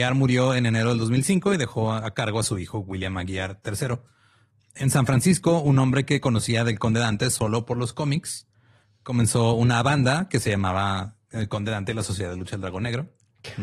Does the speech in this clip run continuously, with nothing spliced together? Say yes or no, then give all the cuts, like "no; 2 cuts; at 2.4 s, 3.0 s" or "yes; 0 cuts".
yes; 0 cuts